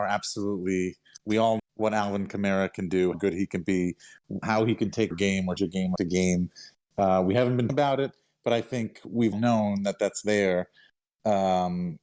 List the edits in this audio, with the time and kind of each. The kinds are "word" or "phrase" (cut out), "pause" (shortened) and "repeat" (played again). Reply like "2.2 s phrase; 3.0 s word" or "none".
1.6 s word; 3.1 s word; 4.4 s word; 5.1 s word; 5.6 s word; 6.0 s word; 7.7 s word; 9.3 s word